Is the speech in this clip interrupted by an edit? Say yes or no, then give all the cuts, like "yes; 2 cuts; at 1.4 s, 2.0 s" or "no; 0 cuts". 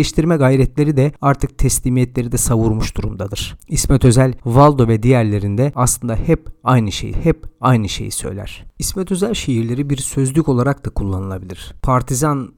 yes; 1 cut; at 7.1 s